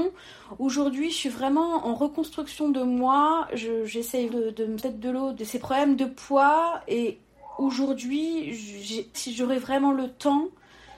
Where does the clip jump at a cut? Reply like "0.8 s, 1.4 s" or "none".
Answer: 1.8 s, 4.3 s, 4.8 s, 5.3 s, 9.1 s